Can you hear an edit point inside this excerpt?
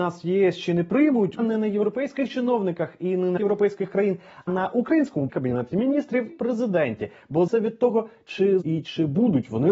yes; 7 cuts; at 1.4 s, 3.4 s, 4.5 s, 5.3 s, 6.3 s, 7.5 s, 8.6 s

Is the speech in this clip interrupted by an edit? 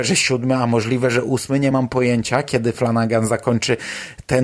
no; 0 cuts

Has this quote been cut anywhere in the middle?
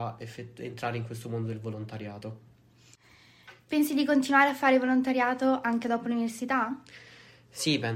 no; 0 cuts

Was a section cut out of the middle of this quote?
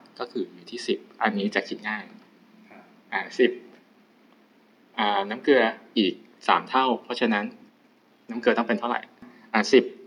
no; 0 cuts

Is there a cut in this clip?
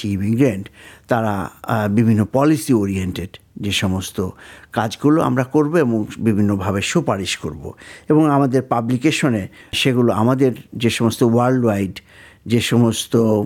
no; 0 cuts

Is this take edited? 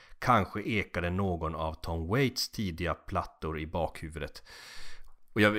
no; 0 cuts

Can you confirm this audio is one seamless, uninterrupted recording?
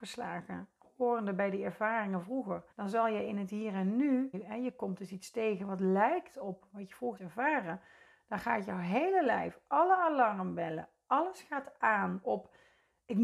no; 4 cuts; at 2.2 s, 2.7 s, 4.3 s, 7.2 s

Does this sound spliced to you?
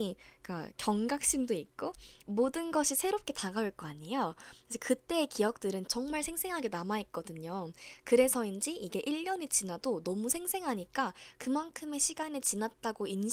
yes; 2 cuts; at 2.2 s, 5.9 s

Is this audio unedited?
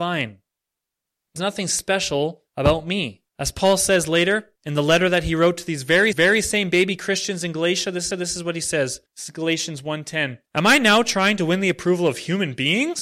no; 8 cuts; at 1.4 s, 2.5 s, 3.3 s, 4.6 s, 6.1 s, 8.1 s, 9.1 s, 10.5 s

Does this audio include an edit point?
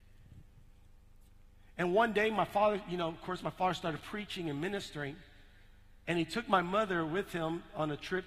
no; 0 cuts

